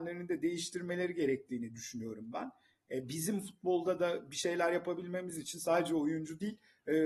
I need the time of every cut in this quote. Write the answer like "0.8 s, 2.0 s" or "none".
none